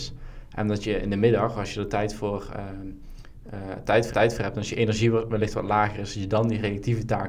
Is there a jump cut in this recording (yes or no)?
yes